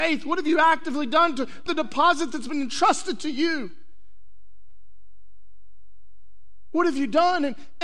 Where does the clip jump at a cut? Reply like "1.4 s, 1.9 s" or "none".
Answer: 1.7 s